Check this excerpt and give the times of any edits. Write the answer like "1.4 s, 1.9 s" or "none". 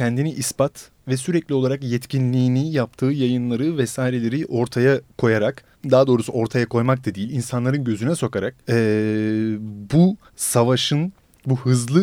5.7 s, 8.6 s, 10.3 s